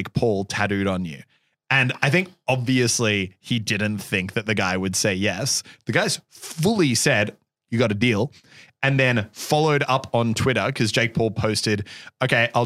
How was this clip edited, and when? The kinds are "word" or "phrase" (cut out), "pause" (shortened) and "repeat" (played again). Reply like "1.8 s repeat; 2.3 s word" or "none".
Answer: none